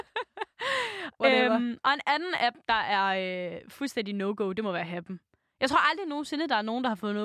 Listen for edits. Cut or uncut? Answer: uncut